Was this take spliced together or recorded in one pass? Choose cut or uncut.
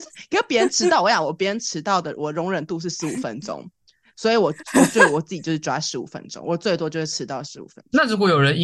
uncut